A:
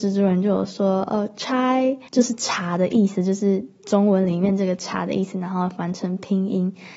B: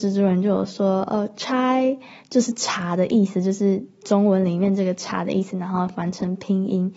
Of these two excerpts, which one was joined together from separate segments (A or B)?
A